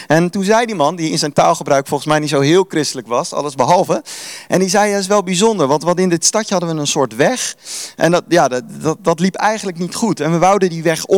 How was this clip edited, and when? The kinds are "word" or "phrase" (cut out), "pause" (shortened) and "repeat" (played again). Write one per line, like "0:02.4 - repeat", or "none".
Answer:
none